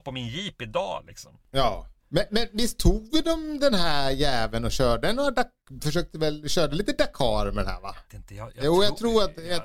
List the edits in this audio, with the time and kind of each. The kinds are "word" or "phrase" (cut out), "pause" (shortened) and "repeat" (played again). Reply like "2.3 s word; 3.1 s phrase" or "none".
2.0 s pause; 8.0 s pause

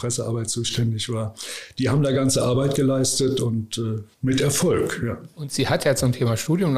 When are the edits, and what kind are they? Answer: 4.1 s pause; 5.3 s pause

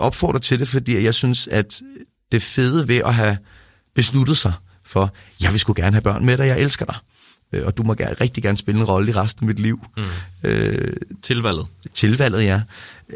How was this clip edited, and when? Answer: none

